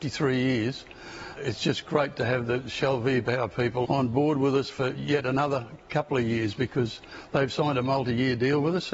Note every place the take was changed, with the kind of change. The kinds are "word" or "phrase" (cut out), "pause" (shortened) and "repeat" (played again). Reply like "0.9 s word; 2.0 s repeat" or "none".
1.4 s word; 3.8 s word